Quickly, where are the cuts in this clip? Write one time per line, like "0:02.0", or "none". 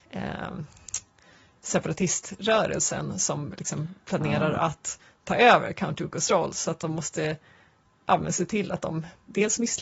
none